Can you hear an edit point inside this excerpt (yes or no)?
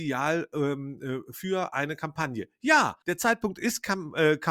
yes